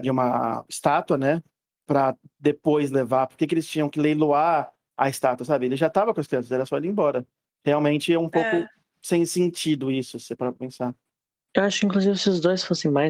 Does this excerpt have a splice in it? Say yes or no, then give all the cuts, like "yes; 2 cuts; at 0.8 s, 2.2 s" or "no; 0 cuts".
no; 0 cuts